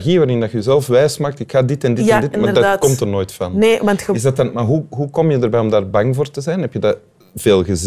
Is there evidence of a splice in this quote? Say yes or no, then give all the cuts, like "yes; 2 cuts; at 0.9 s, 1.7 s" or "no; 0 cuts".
no; 0 cuts